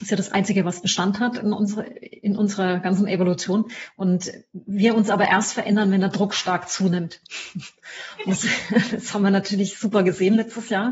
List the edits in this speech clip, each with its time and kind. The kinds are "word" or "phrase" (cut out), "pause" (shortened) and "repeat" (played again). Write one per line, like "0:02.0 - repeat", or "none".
none